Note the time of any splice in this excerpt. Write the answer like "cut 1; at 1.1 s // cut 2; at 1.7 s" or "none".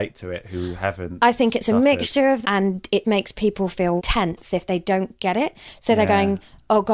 cut 1; at 2.4 s // cut 2; at 3.0 s // cut 3; at 4.0 s

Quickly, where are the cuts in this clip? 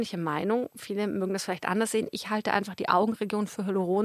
none

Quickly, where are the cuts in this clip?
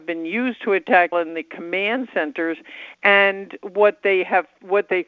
cut 1; at 1.1 s

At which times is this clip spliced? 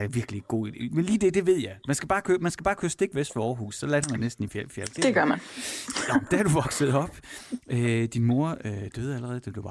cut 1; at 5.0 s

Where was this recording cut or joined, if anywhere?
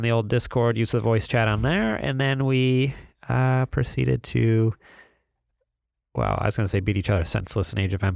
none

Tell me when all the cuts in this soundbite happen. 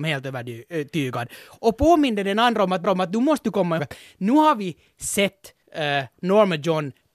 cut 1; at 2.8 s // cut 2; at 3.8 s // cut 3; at 5.6 s

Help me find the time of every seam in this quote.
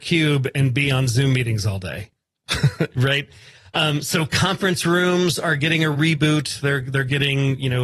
none

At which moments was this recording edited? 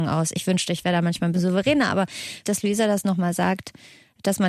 cut 1; at 1.3 s // cut 2; at 2.4 s

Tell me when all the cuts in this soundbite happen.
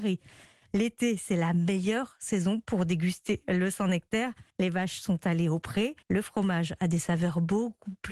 cut 1; at 4.5 s // cut 2; at 6.0 s

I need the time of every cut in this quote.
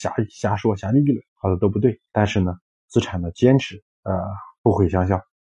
cut 1; at 1.3 s // cut 2; at 2.1 s // cut 3; at 3.9 s

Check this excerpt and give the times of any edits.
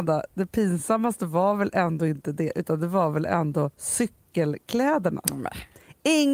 cut 1; at 3.7 s

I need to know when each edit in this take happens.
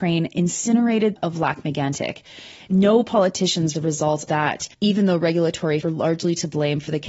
cut 1; at 1.2 s // cut 2; at 3.7 s // cut 3; at 4.3 s // cut 4; at 4.7 s // cut 5; at 5.8 s

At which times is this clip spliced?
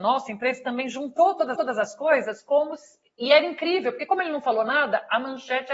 cut 1; at 1.5 s

